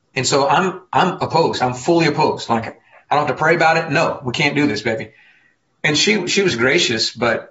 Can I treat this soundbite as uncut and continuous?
yes; 0 cuts

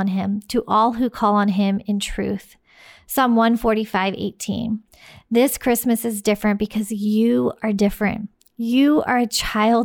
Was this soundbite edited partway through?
no; 0 cuts

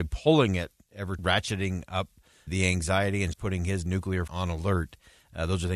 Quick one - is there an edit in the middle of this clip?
yes; 4 cuts; at 1.2 s, 2.5 s, 3.3 s, 4.3 s

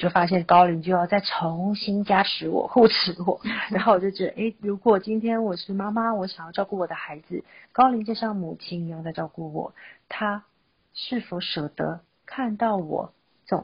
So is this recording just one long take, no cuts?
yes; 0 cuts

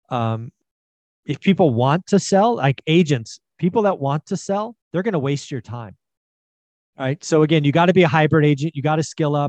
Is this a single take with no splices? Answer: no; 2 cuts; at 4.8 s, 6.7 s

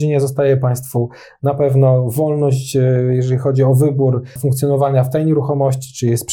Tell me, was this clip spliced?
yes; 1 cut; at 4.4 s

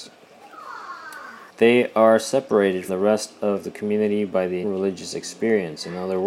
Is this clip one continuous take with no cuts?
no; 3 cuts; at 1.5 s, 2.9 s, 4.6 s

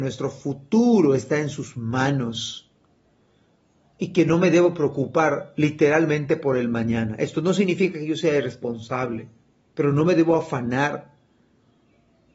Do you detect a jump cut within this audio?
no; 0 cuts

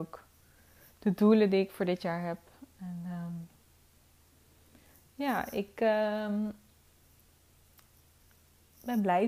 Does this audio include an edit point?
no; 0 cuts

